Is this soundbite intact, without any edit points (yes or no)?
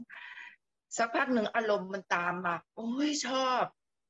no